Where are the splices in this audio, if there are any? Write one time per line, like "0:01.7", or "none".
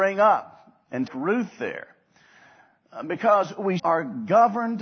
0:01.1
0:03.8